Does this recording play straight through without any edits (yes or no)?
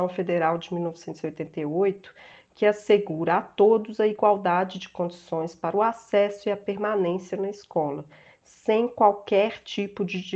yes